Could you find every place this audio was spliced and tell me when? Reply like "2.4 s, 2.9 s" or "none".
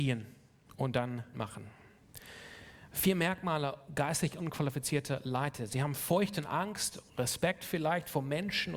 1.3 s, 7.1 s